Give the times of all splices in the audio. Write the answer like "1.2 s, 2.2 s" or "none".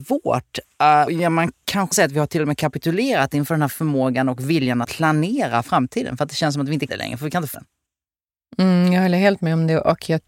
1.1 s, 1.9 s, 4.8 s, 6.9 s, 7.5 s